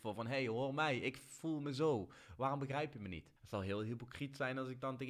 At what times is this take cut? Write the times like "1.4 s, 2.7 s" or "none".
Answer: 3.4 s